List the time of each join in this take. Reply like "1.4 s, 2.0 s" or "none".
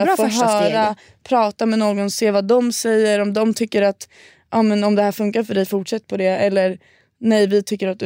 none